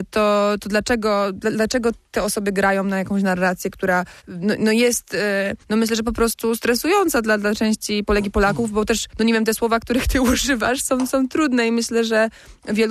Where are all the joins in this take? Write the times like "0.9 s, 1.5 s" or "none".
4.2 s, 5.6 s, 9.1 s